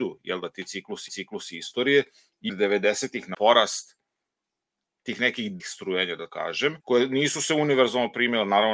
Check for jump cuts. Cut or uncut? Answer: cut